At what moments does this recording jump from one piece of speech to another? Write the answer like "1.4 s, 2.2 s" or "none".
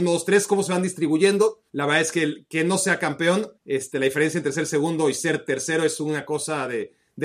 1.7 s, 3.6 s